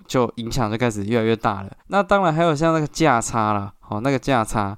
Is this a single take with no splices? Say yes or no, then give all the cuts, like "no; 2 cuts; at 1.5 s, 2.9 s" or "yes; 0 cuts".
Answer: no; 1 cut; at 1.8 s